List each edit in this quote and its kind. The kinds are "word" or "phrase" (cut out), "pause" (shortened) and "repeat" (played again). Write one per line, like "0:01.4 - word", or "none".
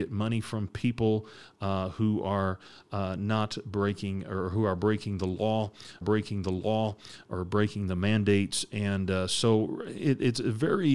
0:06.0 - repeat